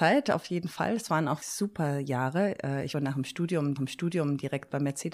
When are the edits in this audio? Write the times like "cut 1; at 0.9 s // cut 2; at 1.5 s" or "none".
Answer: cut 1; at 1.4 s // cut 2; at 2.9 s // cut 3; at 3.8 s